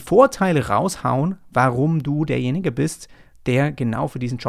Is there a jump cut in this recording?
no; 0 cuts

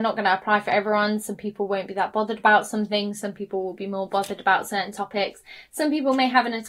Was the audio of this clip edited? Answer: no; 0 cuts

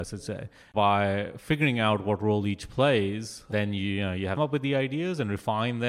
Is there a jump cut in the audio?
yes; 1 cut; at 4.4 s

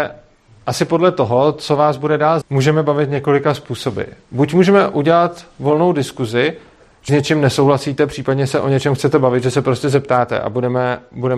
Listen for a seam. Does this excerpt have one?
yes; 2 cuts; at 2.4 s, 7.1 s

